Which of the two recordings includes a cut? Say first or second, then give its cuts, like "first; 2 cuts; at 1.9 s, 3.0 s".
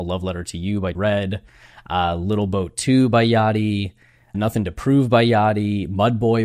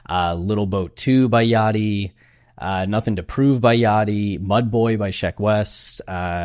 first; 2 cuts; at 0.9 s, 4.3 s